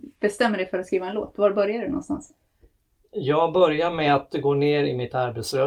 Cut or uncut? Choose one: uncut